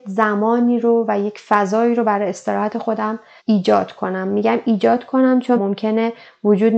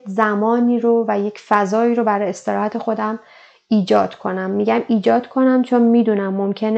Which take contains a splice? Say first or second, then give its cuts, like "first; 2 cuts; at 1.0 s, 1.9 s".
first; 2 cuts; at 3.4 s, 5.6 s